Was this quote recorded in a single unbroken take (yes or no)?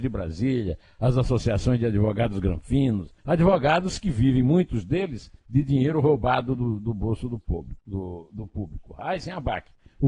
no